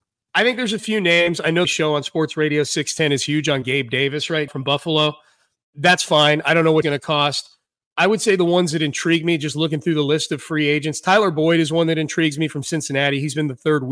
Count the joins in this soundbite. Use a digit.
3